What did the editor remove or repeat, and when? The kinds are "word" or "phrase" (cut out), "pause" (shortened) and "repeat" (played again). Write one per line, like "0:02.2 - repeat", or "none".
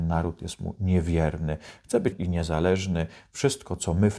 0:02.1 - word